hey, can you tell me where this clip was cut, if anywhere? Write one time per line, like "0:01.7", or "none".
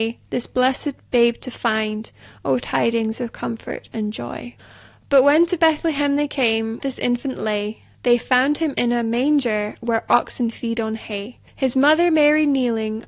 0:06.8
0:11.5